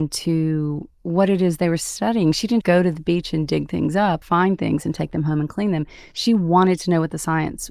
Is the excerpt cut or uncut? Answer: cut